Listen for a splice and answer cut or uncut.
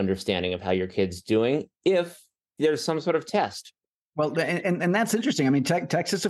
uncut